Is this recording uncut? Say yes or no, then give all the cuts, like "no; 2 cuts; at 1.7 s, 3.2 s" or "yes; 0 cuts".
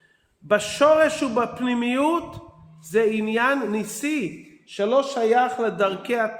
yes; 0 cuts